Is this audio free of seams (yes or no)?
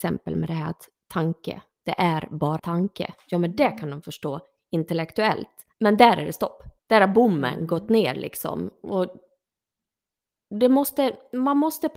no